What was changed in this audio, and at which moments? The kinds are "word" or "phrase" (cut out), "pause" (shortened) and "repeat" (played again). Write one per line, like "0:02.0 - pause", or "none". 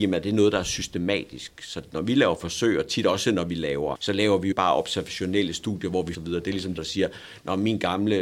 0:04.0 - word
0:04.5 - word
0:06.1 - phrase
0:06.8 - word